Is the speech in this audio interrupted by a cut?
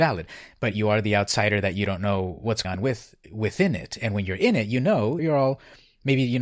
yes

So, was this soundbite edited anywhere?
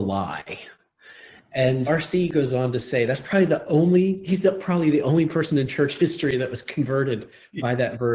yes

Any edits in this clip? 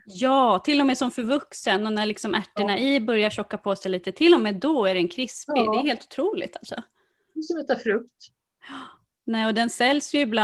no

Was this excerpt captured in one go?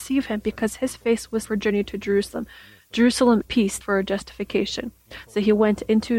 no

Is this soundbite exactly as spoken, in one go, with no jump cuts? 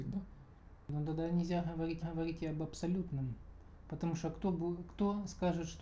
no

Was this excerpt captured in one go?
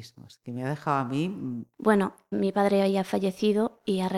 no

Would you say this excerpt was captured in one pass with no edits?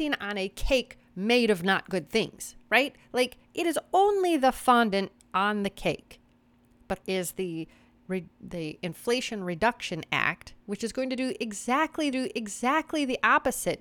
no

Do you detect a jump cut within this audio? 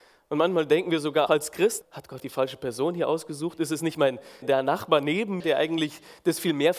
yes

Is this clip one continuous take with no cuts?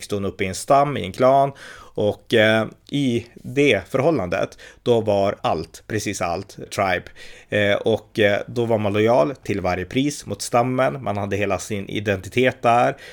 no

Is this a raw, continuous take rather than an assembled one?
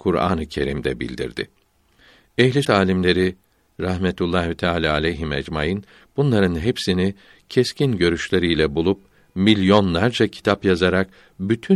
no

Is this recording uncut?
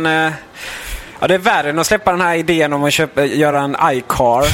yes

